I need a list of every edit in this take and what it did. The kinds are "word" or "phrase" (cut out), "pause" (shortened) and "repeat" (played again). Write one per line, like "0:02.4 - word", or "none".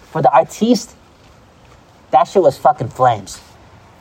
none